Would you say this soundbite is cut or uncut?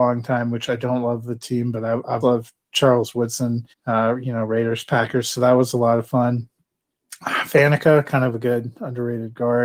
cut